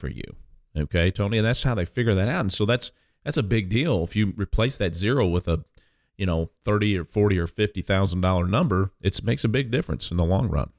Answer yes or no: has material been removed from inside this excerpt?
no